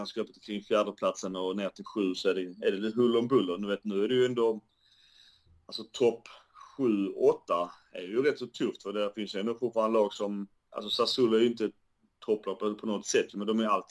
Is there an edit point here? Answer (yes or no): no